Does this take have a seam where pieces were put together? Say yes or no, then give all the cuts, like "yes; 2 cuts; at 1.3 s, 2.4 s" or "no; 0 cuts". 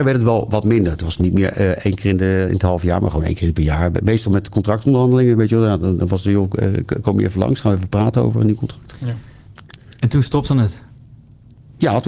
no; 0 cuts